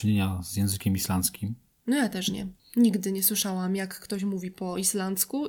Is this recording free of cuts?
yes; 0 cuts

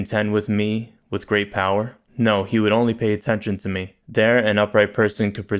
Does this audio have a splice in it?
yes; 2 cuts; at 2.1 s, 4.0 s

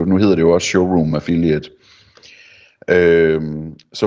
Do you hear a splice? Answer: no; 0 cuts

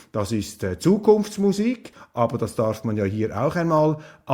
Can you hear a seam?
no; 0 cuts

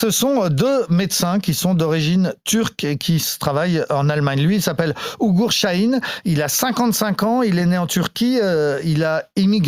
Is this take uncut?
yes; 0 cuts

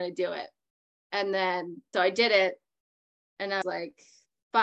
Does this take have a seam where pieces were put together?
yes; 2 cuts; at 1.9 s, 3.6 s

